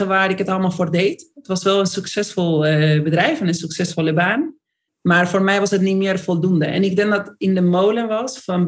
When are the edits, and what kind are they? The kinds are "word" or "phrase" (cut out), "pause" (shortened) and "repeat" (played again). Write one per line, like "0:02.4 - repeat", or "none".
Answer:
0:04.9 - pause